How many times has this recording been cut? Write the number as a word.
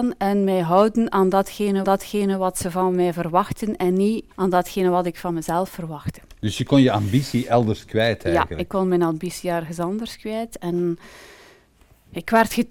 two